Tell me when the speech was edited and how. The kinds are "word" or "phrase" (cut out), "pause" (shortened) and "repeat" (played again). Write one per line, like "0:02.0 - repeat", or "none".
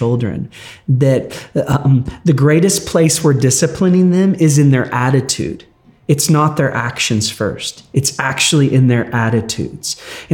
none